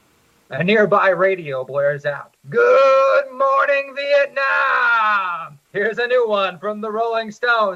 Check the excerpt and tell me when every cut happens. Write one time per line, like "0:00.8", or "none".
0:02.4
0:05.6